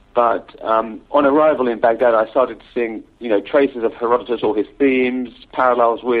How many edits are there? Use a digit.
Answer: 1